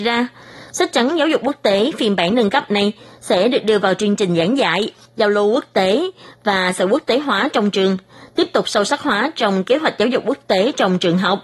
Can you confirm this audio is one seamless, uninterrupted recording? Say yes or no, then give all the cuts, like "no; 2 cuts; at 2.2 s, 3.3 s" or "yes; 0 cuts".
yes; 0 cuts